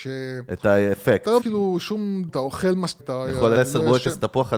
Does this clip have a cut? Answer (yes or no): yes